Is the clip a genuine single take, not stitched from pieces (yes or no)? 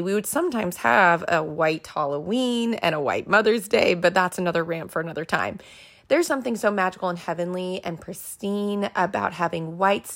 no